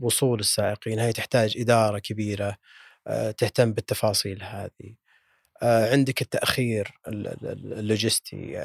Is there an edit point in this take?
no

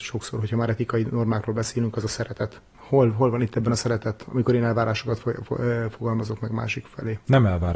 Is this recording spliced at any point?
no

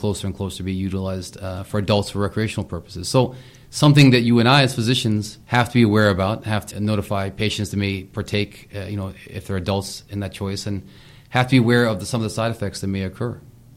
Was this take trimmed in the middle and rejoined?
yes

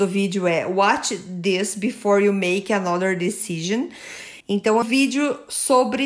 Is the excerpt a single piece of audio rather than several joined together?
no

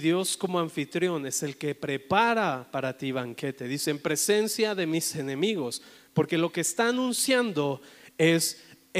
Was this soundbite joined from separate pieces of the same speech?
no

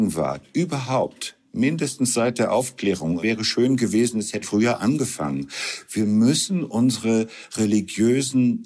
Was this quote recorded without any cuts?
no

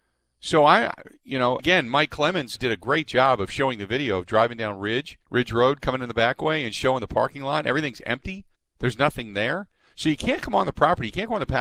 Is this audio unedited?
no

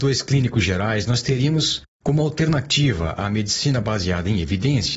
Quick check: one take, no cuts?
yes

